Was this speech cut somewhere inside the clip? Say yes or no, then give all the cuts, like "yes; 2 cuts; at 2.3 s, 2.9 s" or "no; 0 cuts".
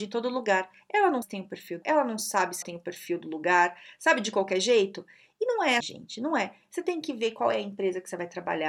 yes; 4 cuts; at 1.2 s, 1.8 s, 2.6 s, 5.8 s